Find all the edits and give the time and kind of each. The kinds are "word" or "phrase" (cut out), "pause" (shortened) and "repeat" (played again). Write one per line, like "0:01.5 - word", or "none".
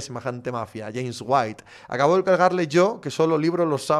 none

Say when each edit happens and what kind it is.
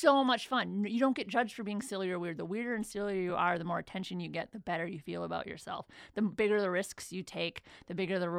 none

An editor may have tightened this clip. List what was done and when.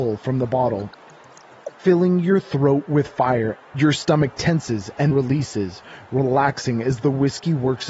0:05.1 - word

